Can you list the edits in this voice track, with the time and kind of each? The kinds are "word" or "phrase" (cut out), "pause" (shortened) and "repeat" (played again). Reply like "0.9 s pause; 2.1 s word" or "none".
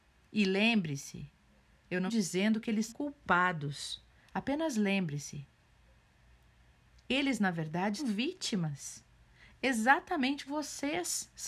2.1 s word; 2.9 s word; 8.0 s word; 10.5 s word